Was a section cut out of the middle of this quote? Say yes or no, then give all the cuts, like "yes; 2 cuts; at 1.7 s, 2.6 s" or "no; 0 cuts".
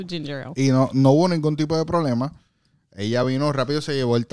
no; 0 cuts